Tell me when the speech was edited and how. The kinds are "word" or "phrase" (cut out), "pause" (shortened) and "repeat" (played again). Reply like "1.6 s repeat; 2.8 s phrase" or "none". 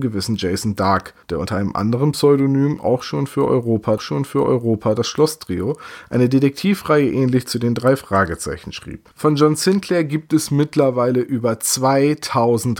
1.2 s pause; 4.0 s repeat; 9.1 s pause